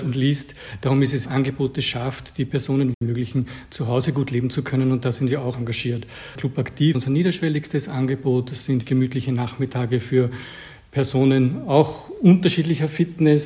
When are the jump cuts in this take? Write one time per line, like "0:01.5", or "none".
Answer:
0:01.2
0:05.5
0:06.9
0:08.8